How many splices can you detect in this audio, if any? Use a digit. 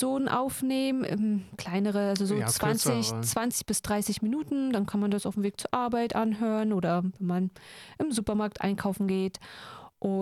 0